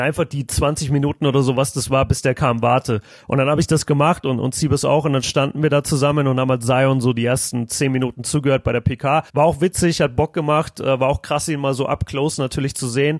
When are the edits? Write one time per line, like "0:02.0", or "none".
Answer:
0:09.3